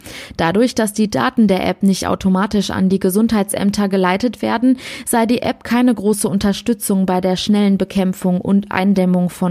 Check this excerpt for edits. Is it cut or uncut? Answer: uncut